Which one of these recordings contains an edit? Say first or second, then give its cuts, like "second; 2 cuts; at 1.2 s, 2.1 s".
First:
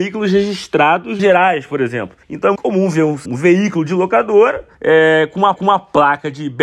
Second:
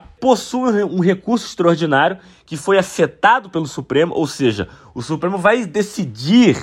first; 6 cuts; at 1.2 s, 2.2 s, 2.6 s, 3.3 s, 4.7 s, 5.6 s